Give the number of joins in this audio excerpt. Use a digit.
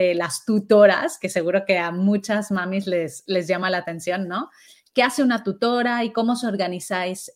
0